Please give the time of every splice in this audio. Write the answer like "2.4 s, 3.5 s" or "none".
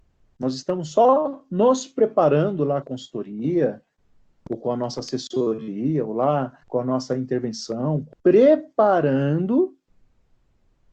2.8 s, 6.6 s, 8.1 s